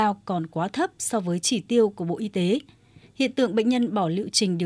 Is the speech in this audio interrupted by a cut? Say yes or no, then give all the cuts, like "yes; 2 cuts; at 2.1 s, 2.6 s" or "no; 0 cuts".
no; 0 cuts